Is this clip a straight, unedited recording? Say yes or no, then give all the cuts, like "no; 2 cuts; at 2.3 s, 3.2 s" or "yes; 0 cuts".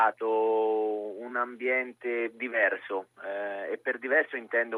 yes; 0 cuts